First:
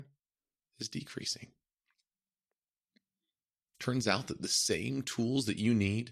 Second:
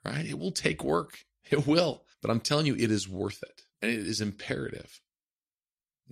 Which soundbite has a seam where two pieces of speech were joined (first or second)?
second